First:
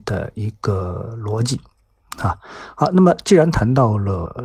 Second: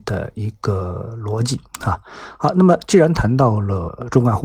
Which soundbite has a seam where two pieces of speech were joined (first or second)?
second